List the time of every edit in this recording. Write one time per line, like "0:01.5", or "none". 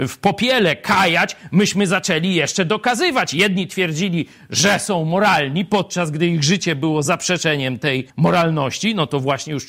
0:08.1